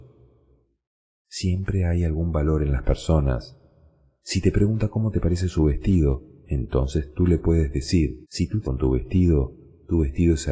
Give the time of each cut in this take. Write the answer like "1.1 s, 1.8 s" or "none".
8.2 s, 8.6 s